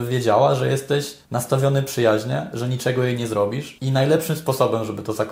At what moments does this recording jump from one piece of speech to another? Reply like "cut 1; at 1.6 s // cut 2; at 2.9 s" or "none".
cut 1; at 1.2 s